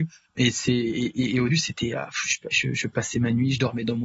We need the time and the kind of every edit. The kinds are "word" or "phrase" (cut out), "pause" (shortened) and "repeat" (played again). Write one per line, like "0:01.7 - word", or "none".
0:01.5 - word